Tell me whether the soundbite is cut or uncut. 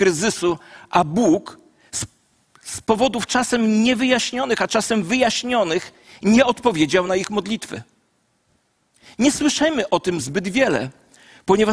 uncut